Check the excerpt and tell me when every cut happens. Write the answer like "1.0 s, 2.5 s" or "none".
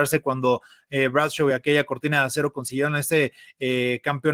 none